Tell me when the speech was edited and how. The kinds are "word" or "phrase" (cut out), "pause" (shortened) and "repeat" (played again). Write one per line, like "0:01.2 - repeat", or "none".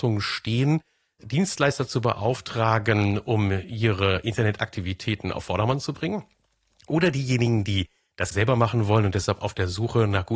0:08.3 - word